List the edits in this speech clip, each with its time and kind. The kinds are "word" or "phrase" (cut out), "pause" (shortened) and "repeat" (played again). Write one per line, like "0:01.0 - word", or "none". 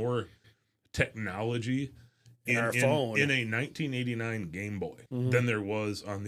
0:05.1 - pause